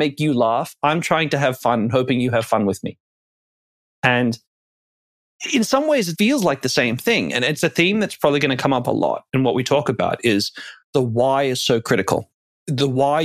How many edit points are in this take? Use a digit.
0